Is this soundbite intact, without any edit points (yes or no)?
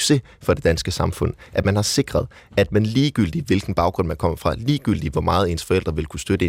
yes